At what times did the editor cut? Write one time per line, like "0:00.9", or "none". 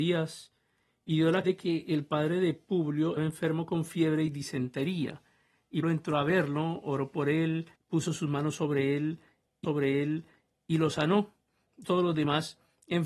0:01.4
0:03.2
0:05.8
0:07.8
0:09.6
0:11.8